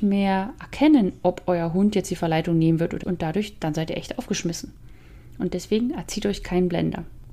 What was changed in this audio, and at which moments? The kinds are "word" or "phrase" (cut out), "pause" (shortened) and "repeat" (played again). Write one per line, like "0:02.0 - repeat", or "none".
0:03.0 - word